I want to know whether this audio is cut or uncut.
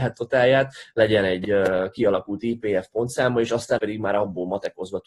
cut